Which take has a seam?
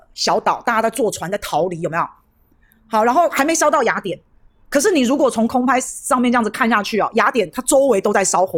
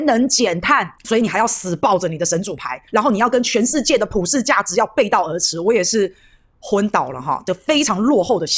second; 1 cut; at 2.9 s

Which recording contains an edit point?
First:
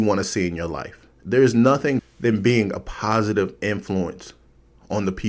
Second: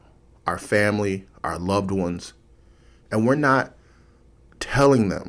first; 2 cuts; at 1.2 s, 2.0 s

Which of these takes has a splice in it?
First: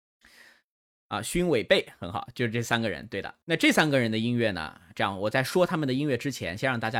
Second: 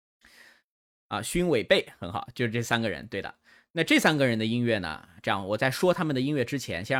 first; 1 cut; at 3.4 s

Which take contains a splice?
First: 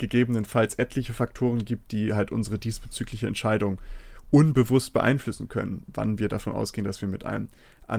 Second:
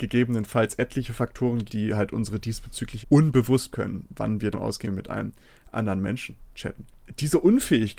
second; 5 cuts; at 1.7 s, 3.0 s, 3.7 s, 4.5 s, 4.8 s

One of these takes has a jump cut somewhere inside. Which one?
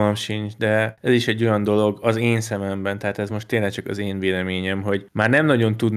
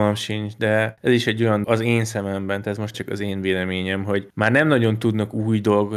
second; 3 cuts; at 1.6 s, 2.6 s, 2.9 s

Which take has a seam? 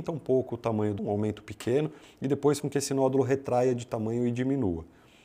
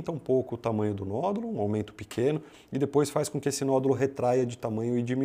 first; 2 cuts; at 1.0 s, 2.6 s

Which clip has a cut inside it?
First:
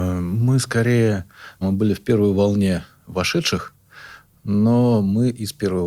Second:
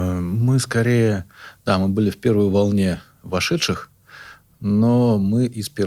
first; 1 cut; at 1.6 s

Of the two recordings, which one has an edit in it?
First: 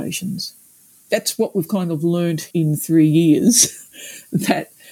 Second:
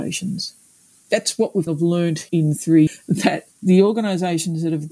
second; 3 cuts; at 1.7 s, 2.9 s, 3.5 s

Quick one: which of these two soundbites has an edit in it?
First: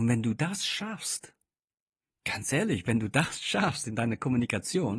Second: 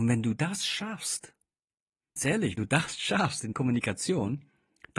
second; 3 cuts; at 2.2 s, 2.6 s, 3.5 s

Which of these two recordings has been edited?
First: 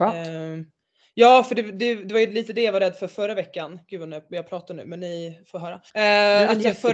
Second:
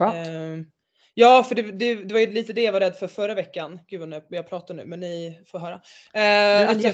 first; 1 cut; at 5.9 s

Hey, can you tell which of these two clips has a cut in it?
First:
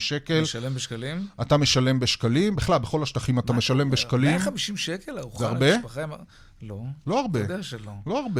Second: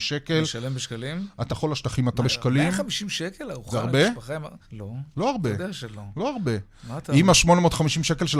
second; 3 cuts; at 1.5 s, 2.2 s, 4.6 s

